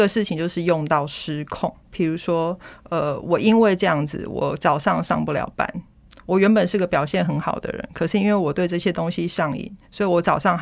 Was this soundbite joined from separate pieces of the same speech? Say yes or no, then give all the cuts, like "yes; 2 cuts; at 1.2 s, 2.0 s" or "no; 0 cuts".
yes; 1 cut; at 1.8 s